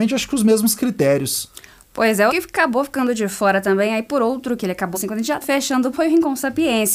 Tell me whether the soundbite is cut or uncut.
cut